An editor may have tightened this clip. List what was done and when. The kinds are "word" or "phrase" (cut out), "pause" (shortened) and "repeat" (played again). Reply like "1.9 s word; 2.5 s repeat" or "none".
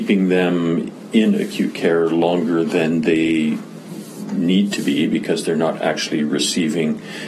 none